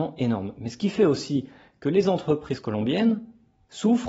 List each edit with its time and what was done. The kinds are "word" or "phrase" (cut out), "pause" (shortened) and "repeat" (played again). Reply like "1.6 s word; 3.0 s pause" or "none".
none